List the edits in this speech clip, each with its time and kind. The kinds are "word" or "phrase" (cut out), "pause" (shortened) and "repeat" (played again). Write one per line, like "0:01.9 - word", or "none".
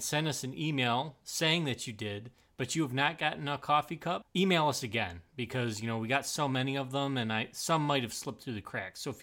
0:04.3 - pause